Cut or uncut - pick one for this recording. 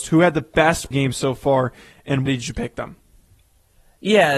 cut